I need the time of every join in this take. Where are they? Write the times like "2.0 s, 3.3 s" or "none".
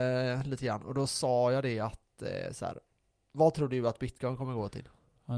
3.0 s

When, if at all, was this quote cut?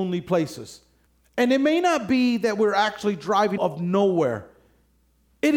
1.1 s, 3.6 s

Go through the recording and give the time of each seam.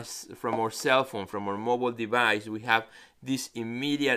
none

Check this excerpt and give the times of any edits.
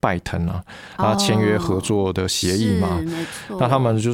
none

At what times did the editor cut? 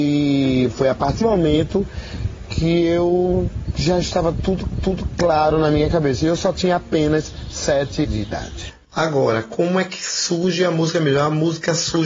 1.2 s, 4.7 s, 8.0 s

